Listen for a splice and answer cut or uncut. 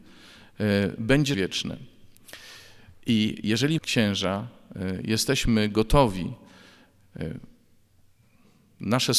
cut